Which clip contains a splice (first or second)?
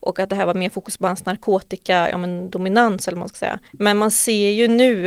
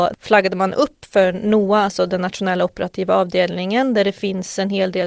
first